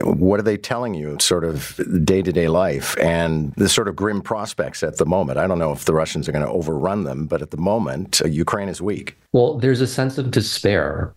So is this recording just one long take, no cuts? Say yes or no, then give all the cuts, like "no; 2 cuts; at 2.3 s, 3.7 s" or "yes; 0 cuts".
no; 4 cuts; at 1.2 s, 3.5 s, 8.2 s, 9.3 s